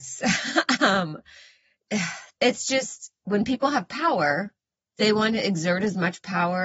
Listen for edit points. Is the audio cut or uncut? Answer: uncut